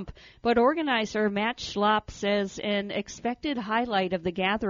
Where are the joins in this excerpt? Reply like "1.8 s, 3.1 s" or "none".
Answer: none